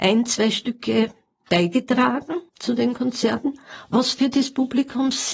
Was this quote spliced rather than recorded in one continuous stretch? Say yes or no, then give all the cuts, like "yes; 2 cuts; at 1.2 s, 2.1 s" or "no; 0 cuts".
yes; 1 cut; at 2.5 s